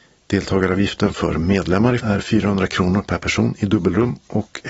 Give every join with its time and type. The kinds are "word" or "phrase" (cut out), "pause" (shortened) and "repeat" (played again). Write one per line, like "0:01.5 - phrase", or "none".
0:02.0 - word